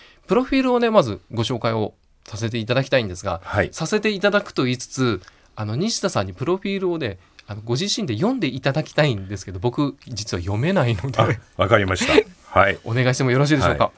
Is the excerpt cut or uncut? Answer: uncut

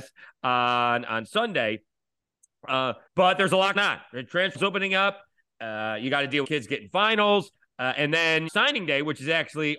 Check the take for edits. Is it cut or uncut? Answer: cut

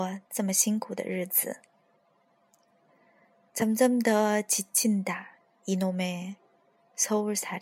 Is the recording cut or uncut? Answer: uncut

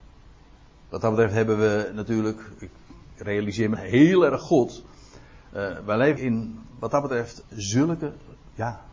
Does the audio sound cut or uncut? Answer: cut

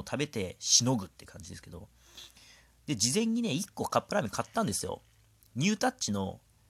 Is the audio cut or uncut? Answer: uncut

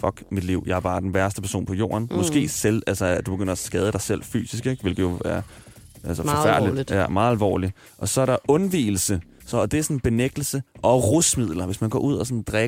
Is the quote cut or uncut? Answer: cut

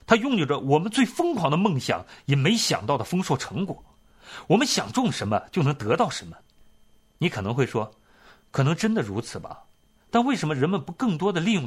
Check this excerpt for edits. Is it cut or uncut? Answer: uncut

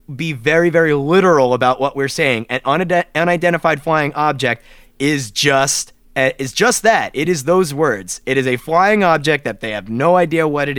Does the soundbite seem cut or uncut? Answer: uncut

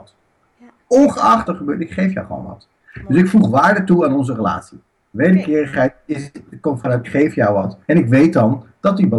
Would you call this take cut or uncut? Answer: cut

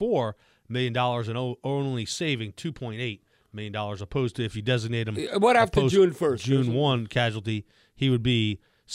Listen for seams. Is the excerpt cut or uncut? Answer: uncut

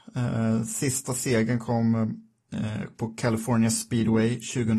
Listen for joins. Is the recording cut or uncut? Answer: uncut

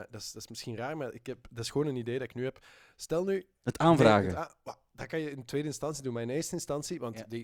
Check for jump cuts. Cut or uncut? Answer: uncut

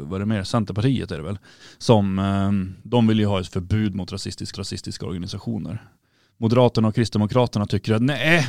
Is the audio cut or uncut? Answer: cut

